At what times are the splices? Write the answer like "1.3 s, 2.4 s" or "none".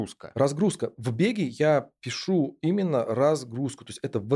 none